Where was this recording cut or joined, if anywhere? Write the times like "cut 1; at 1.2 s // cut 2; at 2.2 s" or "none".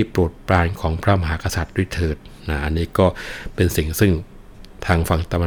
cut 1; at 2.4 s